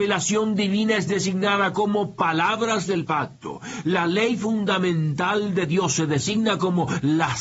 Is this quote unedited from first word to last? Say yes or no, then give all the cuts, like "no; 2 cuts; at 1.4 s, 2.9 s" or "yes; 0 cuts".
yes; 0 cuts